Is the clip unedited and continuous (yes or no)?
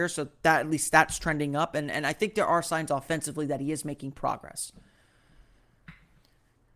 yes